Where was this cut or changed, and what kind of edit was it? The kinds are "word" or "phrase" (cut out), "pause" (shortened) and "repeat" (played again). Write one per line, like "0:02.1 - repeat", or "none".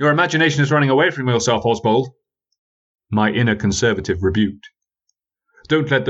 none